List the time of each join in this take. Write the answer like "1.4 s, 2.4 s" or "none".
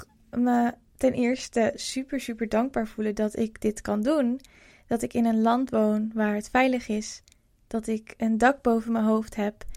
none